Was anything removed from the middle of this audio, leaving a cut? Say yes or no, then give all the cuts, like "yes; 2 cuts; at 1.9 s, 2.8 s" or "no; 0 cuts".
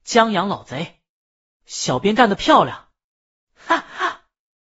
no; 0 cuts